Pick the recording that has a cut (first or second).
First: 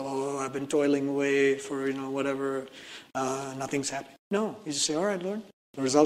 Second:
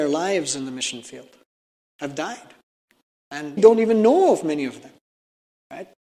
second